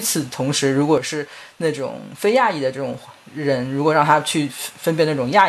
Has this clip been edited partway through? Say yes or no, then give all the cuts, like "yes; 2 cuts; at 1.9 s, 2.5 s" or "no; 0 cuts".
no; 0 cuts